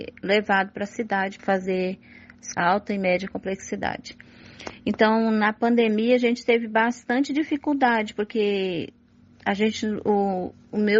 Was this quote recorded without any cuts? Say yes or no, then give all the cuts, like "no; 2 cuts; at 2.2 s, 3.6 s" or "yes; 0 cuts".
no; 2 cuts; at 1.4 s, 2.5 s